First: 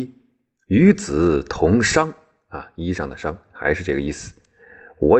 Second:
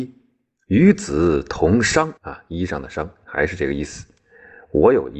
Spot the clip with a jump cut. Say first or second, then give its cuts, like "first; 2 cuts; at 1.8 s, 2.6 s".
second; 1 cut; at 2.2 s